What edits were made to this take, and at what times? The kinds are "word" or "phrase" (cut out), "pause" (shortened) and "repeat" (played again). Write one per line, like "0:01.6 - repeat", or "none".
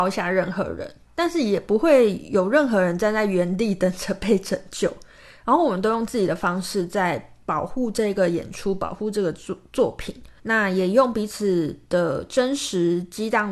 0:01.0 - pause
0:10.4 - pause